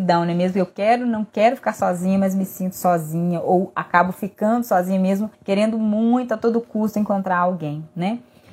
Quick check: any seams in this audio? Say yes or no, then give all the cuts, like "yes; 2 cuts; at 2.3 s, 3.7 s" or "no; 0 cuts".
yes; 1 cut; at 5.3 s